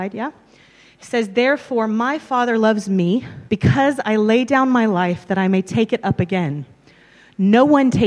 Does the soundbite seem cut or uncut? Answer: cut